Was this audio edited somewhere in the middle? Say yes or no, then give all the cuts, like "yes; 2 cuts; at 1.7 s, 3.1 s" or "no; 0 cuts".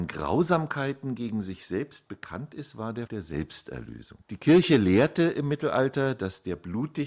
yes; 2 cuts; at 3.1 s, 4.2 s